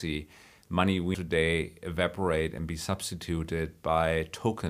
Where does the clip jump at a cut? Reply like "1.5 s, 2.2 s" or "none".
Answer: 1.1 s